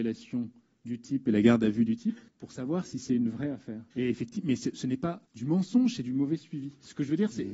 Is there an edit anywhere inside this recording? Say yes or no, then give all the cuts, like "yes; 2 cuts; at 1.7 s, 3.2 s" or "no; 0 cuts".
yes; 3 cuts; at 2.3 s, 3.9 s, 5.3 s